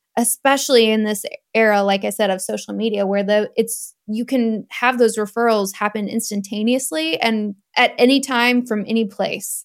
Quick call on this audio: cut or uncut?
cut